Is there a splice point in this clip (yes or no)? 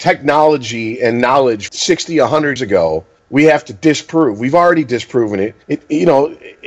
yes